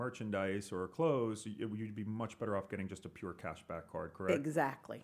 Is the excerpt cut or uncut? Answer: uncut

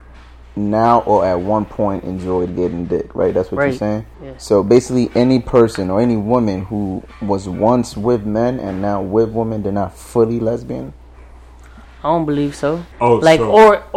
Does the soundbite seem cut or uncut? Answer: cut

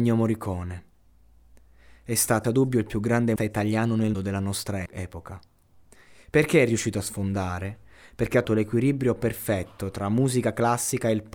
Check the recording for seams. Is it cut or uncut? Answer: cut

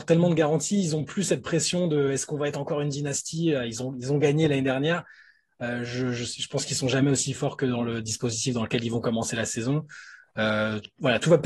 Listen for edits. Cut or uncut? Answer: uncut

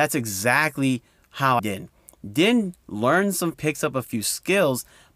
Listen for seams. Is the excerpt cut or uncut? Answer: cut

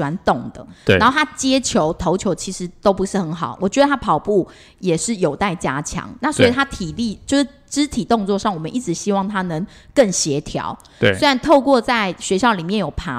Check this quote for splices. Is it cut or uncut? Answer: uncut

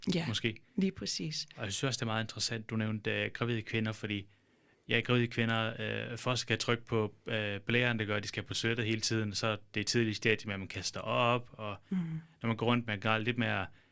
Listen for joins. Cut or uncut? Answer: uncut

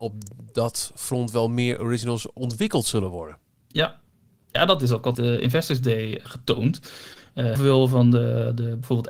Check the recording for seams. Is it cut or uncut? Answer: cut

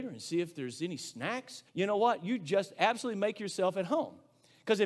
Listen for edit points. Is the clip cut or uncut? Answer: cut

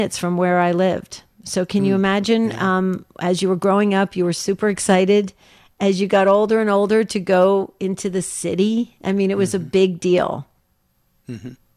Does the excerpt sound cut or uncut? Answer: uncut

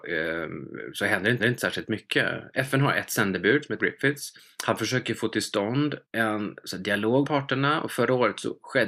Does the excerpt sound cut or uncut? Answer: cut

